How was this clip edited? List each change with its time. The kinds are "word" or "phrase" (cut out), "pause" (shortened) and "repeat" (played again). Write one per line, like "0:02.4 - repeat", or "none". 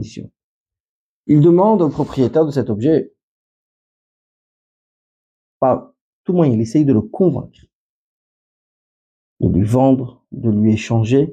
none